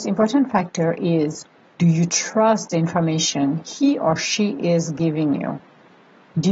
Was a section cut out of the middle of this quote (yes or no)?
no